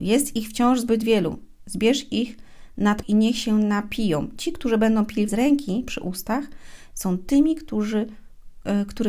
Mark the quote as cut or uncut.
cut